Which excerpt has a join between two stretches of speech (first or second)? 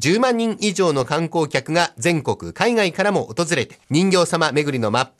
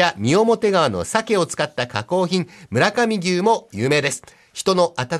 first